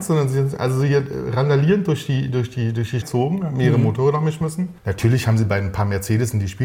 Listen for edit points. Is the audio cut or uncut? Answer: cut